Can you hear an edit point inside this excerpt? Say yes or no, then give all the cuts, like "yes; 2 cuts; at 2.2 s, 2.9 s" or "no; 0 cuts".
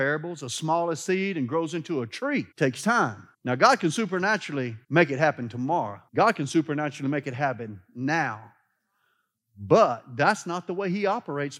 yes; 4 cuts; at 2.5 s, 3.3 s, 4.8 s, 6.1 s